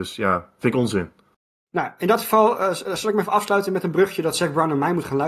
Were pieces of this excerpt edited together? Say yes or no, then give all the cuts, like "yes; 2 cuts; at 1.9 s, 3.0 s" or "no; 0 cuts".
no; 0 cuts